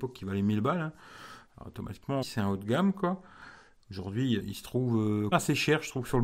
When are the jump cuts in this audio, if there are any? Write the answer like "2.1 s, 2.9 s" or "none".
1.5 s, 2.2 s, 4.4 s, 5.3 s